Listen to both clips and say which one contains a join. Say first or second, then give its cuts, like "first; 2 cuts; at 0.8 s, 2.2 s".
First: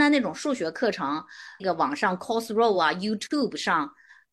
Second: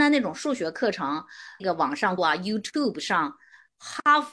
second; 1 cut; at 2.2 s